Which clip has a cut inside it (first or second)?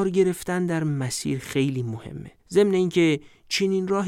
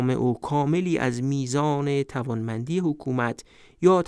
first